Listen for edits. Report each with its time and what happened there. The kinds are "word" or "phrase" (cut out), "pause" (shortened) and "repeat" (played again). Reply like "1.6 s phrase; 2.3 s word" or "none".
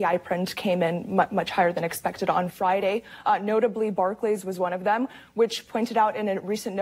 none